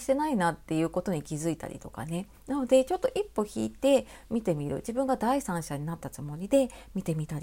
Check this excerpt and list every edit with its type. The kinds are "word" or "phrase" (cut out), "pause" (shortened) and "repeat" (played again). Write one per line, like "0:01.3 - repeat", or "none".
0:02.3 - pause